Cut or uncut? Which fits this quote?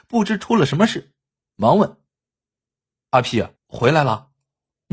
cut